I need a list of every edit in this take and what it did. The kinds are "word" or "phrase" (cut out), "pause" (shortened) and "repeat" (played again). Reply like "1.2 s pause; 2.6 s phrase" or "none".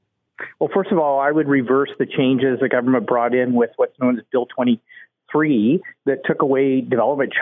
none